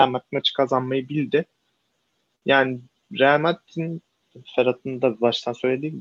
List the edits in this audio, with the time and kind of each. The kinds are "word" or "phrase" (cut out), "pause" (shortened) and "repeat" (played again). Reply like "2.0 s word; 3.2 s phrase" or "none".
none